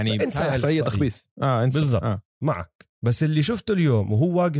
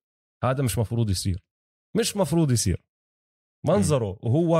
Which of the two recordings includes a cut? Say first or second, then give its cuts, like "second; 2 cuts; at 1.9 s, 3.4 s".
first; 2 cuts; at 1.3 s, 2.9 s